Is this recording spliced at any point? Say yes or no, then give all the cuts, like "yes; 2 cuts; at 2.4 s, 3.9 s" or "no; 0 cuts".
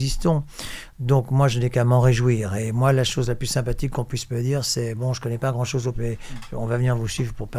yes; 1 cut; at 5.9 s